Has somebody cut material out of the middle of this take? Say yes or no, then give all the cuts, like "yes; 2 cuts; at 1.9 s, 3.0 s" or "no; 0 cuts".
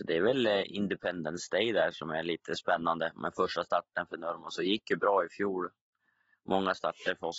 no; 0 cuts